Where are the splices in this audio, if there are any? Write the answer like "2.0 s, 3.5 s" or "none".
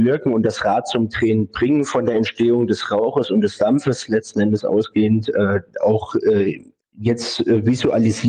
6.8 s